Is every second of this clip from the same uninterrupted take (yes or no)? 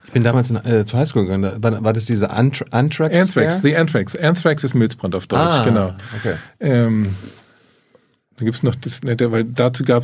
yes